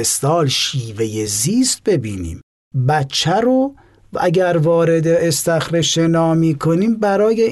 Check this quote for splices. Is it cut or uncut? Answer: uncut